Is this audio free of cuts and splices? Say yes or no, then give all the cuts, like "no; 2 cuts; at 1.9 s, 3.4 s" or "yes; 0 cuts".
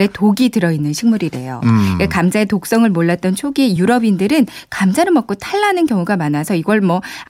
yes; 0 cuts